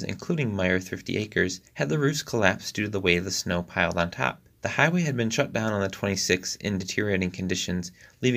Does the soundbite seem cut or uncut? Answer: cut